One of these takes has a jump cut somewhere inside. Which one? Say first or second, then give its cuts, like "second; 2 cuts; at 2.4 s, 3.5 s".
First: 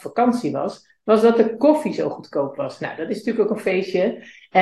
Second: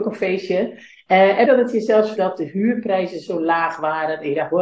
second; 2 cuts; at 1.4 s, 2.2 s